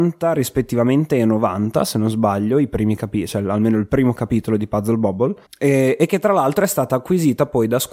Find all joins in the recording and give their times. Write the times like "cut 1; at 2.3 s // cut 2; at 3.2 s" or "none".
cut 1; at 5.4 s